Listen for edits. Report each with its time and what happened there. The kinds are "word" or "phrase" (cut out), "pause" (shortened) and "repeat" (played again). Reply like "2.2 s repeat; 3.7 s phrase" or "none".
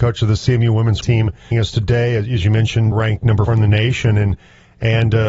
1.0 s word; 1.5 s word; 2.9 s word; 3.5 s word